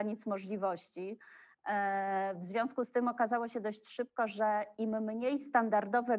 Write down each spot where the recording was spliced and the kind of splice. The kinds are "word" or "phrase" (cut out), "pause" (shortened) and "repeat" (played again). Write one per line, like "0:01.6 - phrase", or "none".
none